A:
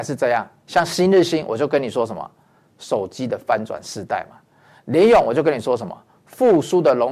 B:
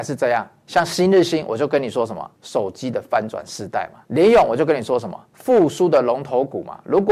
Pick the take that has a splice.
B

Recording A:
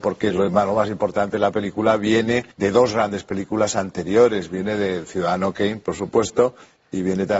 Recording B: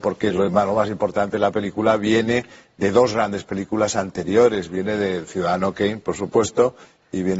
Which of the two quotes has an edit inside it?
A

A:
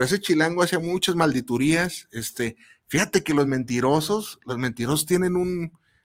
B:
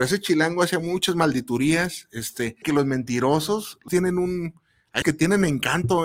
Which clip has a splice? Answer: B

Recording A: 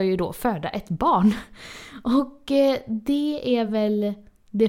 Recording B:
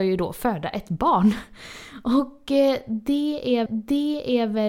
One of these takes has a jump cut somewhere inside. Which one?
B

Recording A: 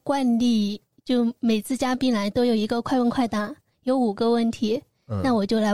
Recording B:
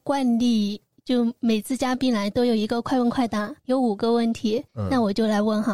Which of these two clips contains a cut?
B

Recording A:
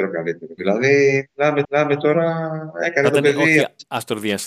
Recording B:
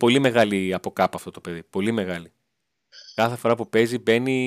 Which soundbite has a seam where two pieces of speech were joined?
A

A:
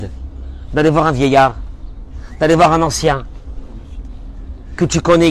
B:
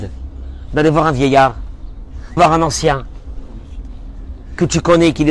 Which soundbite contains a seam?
B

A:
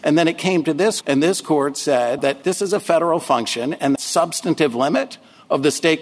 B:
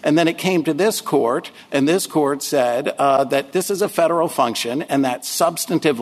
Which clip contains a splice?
A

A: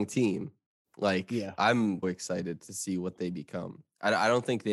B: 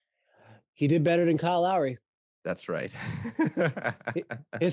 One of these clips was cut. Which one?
A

